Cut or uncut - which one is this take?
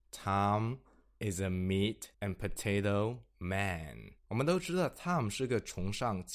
cut